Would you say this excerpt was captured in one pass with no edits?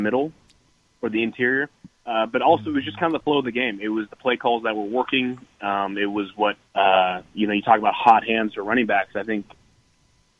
no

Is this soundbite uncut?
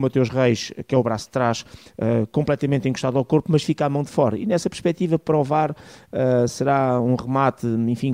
yes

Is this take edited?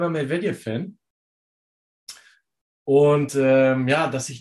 no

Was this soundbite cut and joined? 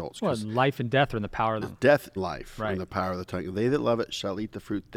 yes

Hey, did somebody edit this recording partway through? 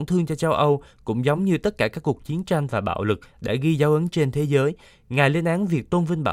no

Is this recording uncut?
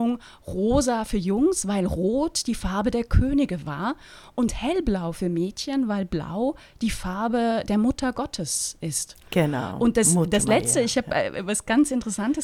yes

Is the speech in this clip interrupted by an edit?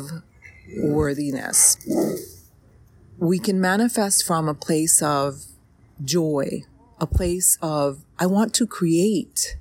no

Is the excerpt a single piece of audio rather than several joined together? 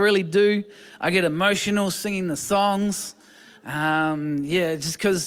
yes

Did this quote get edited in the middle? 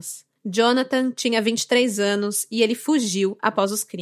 no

